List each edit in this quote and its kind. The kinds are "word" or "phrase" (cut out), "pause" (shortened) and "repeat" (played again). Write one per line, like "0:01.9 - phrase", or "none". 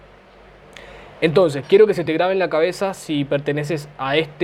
none